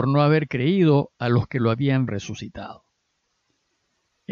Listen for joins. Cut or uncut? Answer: cut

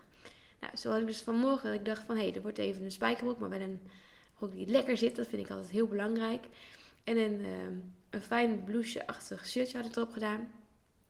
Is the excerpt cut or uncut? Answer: uncut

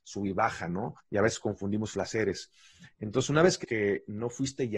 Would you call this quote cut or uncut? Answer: cut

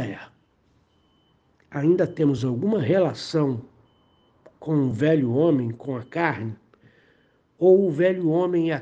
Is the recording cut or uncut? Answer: uncut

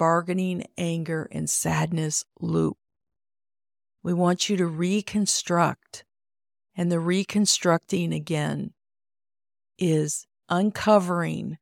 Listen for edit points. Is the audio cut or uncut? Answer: uncut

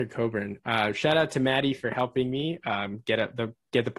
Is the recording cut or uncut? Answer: uncut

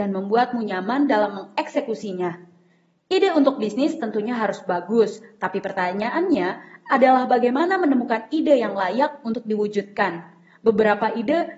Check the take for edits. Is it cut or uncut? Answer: uncut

